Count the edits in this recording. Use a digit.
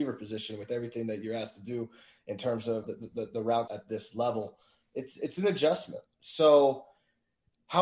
2